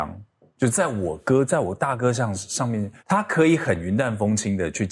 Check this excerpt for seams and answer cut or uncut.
cut